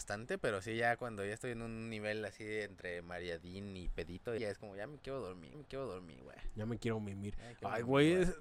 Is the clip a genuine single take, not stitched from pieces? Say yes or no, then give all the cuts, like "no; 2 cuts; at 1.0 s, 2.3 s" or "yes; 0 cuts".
no; 2 cuts; at 4.4 s, 5.5 s